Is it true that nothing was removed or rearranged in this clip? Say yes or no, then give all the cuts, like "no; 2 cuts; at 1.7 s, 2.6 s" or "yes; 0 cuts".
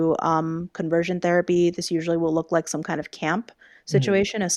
yes; 0 cuts